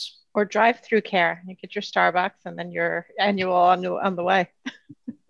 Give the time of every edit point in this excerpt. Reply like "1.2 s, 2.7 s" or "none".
none